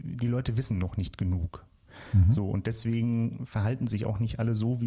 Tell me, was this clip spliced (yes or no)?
no